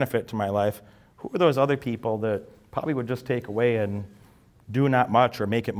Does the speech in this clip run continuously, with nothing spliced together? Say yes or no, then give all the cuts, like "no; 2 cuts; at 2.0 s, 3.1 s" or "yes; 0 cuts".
yes; 0 cuts